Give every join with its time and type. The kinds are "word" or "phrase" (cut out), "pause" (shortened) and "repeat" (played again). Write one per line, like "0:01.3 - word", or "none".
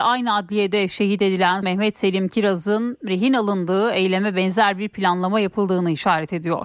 0:01.6 - word